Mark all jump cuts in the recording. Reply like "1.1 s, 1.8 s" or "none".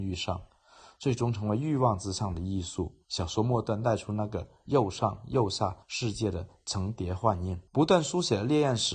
3.0 s, 5.8 s, 7.7 s